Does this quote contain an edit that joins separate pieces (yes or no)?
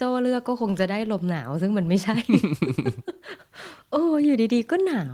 no